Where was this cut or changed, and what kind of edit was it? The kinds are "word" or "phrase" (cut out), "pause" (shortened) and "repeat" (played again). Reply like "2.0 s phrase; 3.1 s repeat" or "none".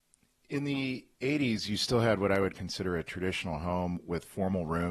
1.1 s pause